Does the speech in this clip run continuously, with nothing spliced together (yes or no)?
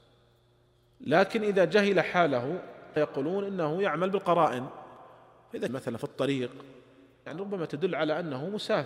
no